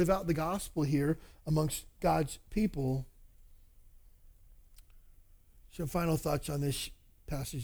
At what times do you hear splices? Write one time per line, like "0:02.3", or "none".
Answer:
none